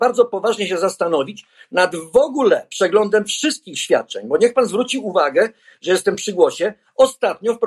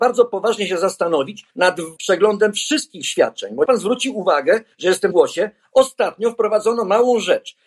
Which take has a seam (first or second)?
second